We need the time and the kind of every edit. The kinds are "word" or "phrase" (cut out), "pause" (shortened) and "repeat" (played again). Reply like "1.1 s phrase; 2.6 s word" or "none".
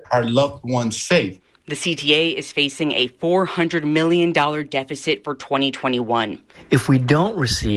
none